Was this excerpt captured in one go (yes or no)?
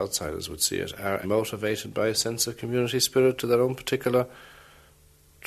no